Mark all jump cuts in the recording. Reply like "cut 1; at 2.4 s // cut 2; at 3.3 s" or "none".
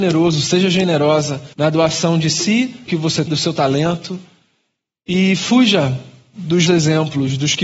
cut 1; at 1.5 s // cut 2; at 2.9 s // cut 3; at 3.3 s // cut 4; at 6.7 s

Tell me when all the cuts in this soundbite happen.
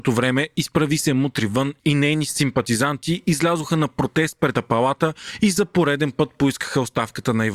cut 1; at 4.5 s

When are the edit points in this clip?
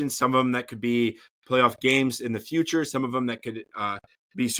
none

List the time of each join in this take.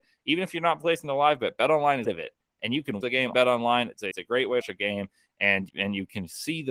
cut 1; at 2.0 s // cut 2; at 3.0 s // cut 3; at 3.3 s // cut 4; at 4.1 s // cut 5; at 4.6 s // cut 6; at 5.7 s

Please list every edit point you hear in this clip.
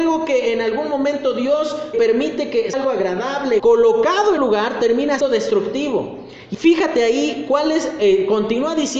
cut 1; at 1.9 s // cut 2; at 2.7 s // cut 3; at 3.6 s // cut 4; at 4.4 s // cut 5; at 5.2 s // cut 6; at 6.5 s

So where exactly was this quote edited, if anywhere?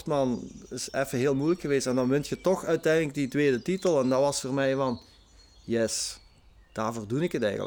none

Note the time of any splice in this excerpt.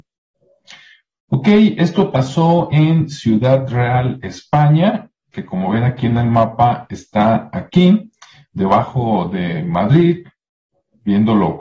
none

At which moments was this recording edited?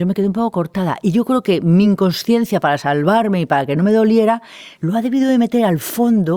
none

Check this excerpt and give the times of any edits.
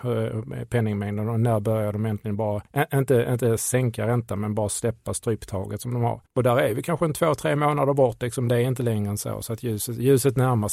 cut 1; at 2.7 s // cut 2; at 6.3 s

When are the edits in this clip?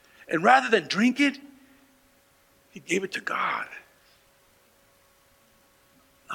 none

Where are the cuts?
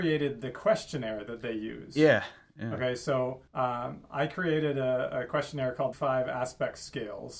cut 1; at 3.5 s // cut 2; at 5.9 s

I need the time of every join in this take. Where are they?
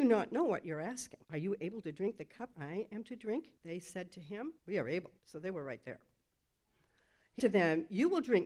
cut 1; at 1.2 s // cut 2; at 2.5 s // cut 3; at 3.6 s // cut 4; at 4.6 s // cut 5; at 5.2 s // cut 6; at 7.4 s

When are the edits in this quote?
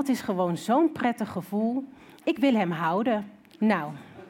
none

